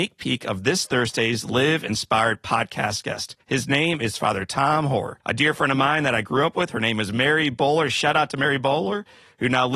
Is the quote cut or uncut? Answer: cut